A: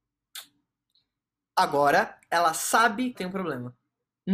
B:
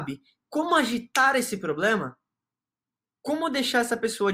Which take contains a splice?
A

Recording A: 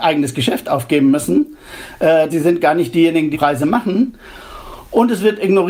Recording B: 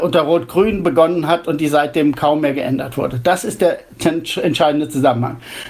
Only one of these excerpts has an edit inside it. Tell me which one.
A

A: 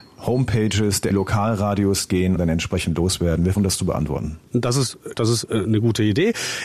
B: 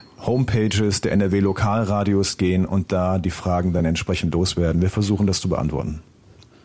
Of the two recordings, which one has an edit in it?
A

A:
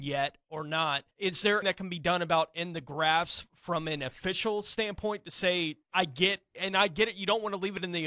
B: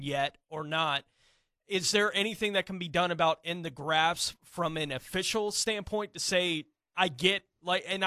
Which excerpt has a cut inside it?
A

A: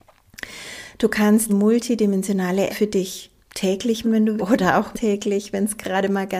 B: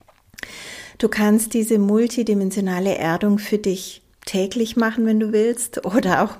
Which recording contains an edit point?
A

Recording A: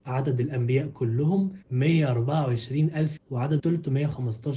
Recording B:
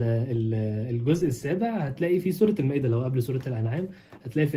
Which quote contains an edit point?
A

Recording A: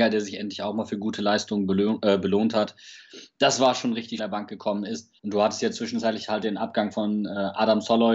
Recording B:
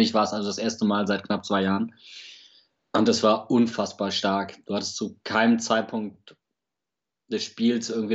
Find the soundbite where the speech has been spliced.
A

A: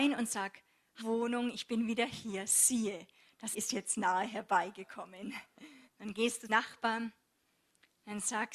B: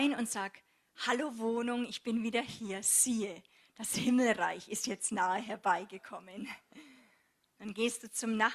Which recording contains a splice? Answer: A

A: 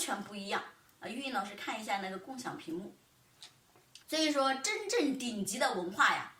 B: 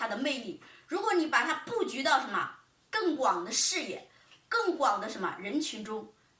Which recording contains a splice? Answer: A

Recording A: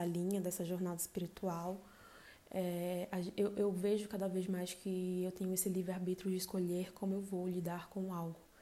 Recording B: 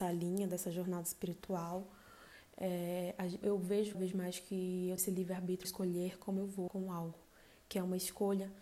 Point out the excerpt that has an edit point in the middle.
B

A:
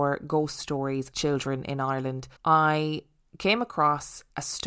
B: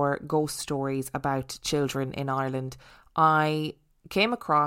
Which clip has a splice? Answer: A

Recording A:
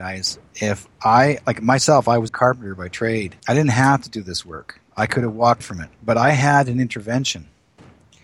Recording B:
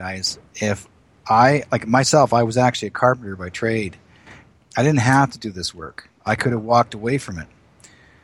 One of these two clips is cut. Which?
A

